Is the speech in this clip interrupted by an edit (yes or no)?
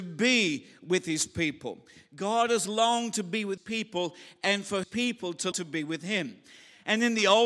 yes